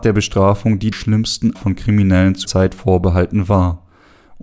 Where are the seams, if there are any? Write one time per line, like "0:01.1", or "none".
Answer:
0:00.9
0:01.5
0:02.4